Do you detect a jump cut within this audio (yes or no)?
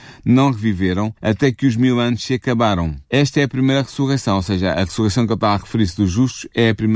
yes